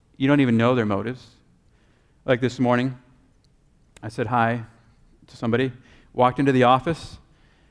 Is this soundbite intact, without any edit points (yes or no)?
yes